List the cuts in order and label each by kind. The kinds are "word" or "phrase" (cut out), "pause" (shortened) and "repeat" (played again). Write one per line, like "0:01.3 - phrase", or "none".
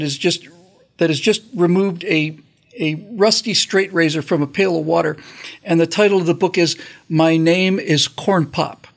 none